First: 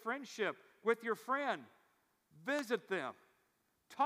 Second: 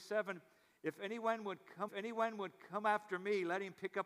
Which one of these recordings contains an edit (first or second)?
second